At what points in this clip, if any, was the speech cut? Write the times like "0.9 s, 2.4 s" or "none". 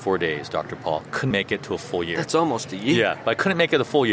1.3 s